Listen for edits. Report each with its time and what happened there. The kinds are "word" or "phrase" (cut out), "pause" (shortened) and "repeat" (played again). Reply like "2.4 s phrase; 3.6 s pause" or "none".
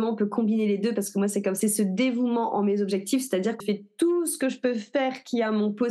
1.6 s phrase; 3.6 s word